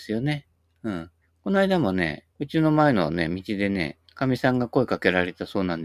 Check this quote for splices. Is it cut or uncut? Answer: cut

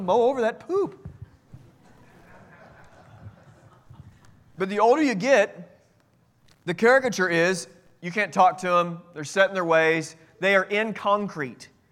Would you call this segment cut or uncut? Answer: uncut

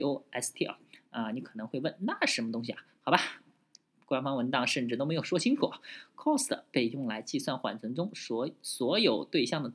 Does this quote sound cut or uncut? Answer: uncut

